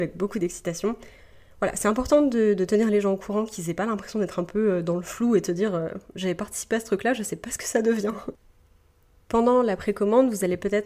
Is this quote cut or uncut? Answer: uncut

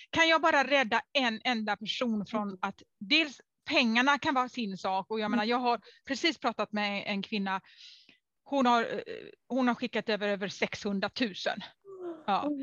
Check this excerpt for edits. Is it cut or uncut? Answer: uncut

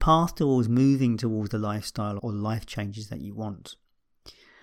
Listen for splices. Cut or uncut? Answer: cut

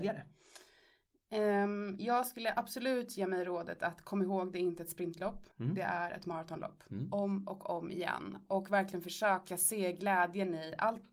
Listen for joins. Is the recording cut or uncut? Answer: cut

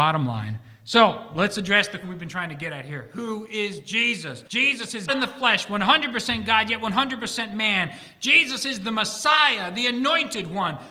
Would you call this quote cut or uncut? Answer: cut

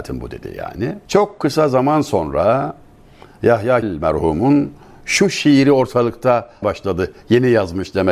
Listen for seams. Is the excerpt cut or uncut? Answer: cut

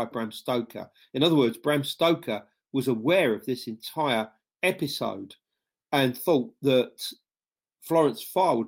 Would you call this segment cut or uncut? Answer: uncut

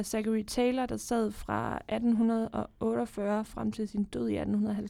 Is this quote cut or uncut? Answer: uncut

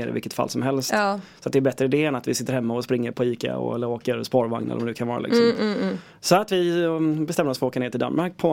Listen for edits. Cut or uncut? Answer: cut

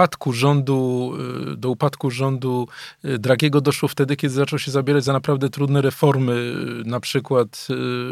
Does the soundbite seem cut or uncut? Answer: uncut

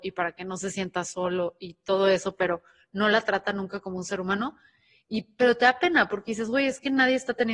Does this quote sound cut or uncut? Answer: uncut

